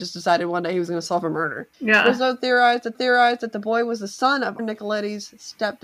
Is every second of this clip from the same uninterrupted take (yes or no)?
no